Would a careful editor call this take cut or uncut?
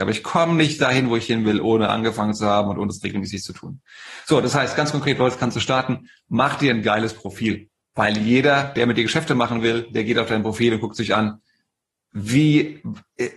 uncut